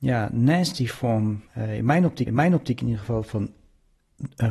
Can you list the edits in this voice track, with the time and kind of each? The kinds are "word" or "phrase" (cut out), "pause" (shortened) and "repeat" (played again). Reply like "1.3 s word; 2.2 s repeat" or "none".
1.5 s pause; 2.3 s repeat